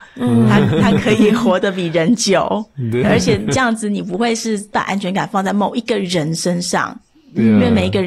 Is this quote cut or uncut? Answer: cut